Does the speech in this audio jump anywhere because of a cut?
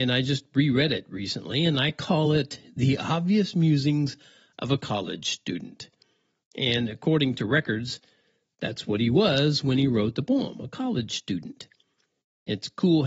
no; 0 cuts

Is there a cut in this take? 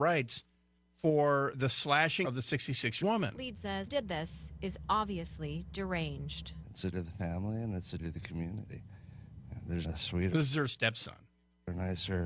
yes; 8 cuts; at 1.5 s, 2.2 s, 3.0 s, 3.6 s, 3.9 s, 6.9 s, 8.0 s, 9.8 s

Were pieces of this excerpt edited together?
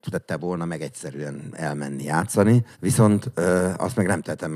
yes; 1 cut; at 2.7 s

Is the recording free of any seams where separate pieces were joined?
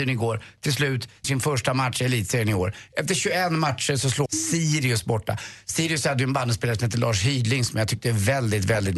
no; 2 cuts; at 1.2 s, 4.3 s

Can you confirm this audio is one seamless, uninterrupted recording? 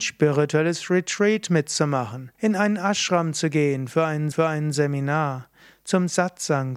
no; 2 cuts; at 2.3 s, 4.3 s

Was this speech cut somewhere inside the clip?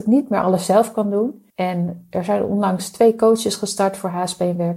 yes; 1 cut; at 1.5 s

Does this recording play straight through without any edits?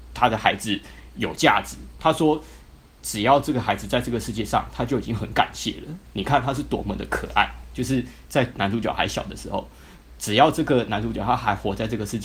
yes; 0 cuts

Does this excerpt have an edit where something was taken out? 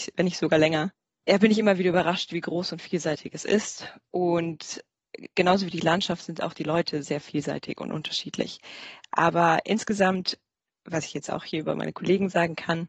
no; 0 cuts

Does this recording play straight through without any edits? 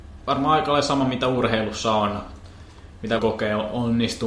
no; 1 cut; at 3.2 s

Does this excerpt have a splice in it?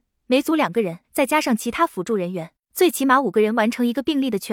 yes; 1 cut; at 1.0 s

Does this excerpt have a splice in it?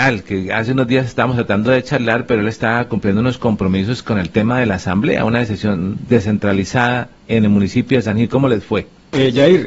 yes; 1 cut; at 6.0 s

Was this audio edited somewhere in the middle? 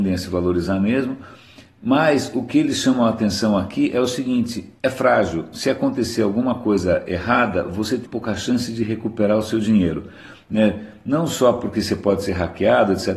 yes; 2 cuts; at 4.8 s, 8.0 s

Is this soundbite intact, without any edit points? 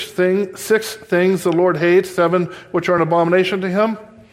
yes; 0 cuts

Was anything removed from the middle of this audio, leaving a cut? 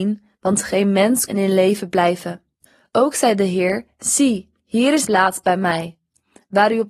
yes; 4 cuts; at 1.3 s, 2.7 s, 4.6 s, 5.0 s

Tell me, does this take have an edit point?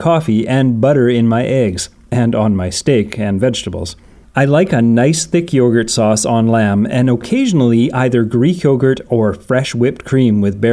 no; 0 cuts

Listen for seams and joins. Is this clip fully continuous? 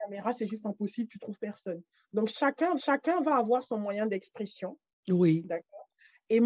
no; 2 cuts; at 2.8 s, 4.9 s

